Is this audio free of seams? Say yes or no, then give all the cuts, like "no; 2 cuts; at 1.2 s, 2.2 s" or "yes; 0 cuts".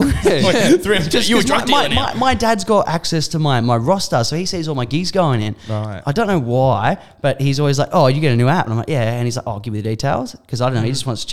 yes; 0 cuts